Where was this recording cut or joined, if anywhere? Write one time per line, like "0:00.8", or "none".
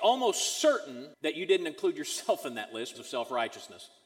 0:01.1
0:02.9